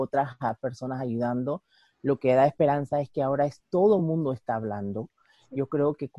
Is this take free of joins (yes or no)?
yes